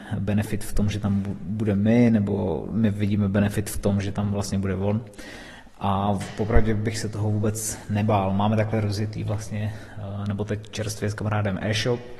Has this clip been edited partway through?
no; 0 cuts

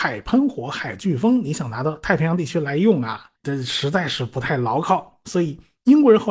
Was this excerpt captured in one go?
no; 1 cut; at 3.4 s

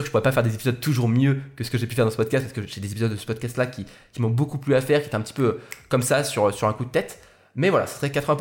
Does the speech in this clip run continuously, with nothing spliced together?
yes; 0 cuts

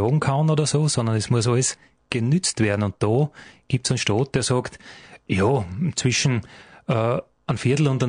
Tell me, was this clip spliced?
no; 0 cuts

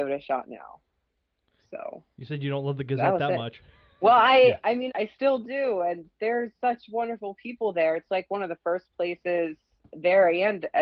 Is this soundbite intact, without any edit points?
no; 2 cuts; at 4.0 s, 4.9 s

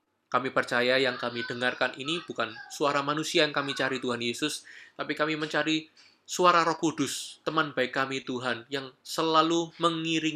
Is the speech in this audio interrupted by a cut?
no; 0 cuts

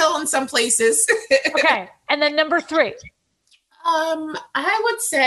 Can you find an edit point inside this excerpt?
no; 0 cuts

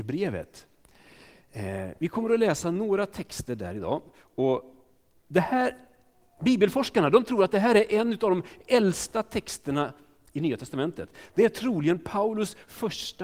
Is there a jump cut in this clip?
no; 0 cuts

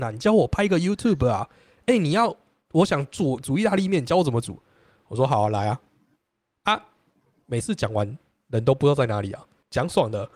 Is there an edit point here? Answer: no; 0 cuts

